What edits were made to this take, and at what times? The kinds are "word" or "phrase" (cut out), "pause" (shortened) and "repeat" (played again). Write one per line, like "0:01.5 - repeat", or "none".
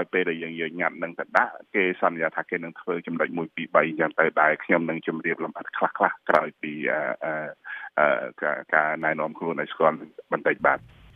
0:08.7 - pause

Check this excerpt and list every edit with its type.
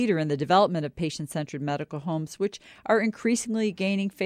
none

